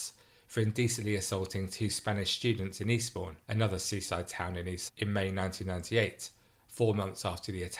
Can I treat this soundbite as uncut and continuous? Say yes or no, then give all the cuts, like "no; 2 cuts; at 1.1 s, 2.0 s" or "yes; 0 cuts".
no; 2 cuts; at 3.4 s, 4.9 s